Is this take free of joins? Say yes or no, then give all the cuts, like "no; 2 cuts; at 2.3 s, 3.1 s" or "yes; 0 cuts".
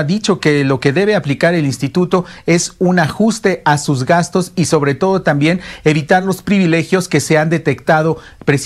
yes; 0 cuts